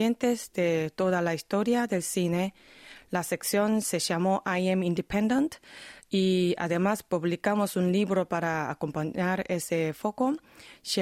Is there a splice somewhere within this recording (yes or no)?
no